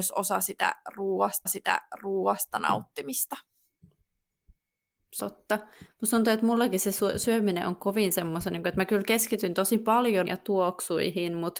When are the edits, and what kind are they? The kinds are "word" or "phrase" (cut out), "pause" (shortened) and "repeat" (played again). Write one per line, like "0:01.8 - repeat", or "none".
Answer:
0:01.5 - repeat
0:05.2 - phrase
0:10.3 - word